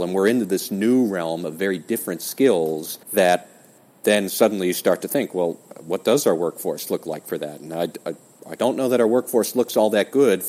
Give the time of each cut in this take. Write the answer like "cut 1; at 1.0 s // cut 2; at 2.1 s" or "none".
cut 1; at 3.0 s